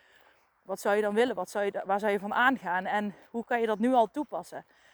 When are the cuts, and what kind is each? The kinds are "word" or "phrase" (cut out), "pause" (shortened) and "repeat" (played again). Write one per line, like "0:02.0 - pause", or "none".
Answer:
none